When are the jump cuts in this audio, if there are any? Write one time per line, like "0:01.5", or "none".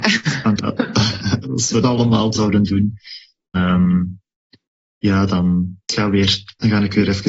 0:01.4
0:01.8
0:02.3
0:03.5
0:05.8